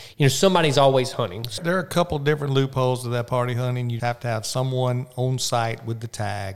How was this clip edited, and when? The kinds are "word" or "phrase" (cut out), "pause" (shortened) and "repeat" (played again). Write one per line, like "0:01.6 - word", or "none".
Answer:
0:01.6 - word
0:04.0 - word